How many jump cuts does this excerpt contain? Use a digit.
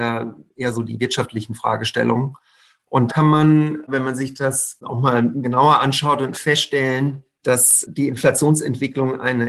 3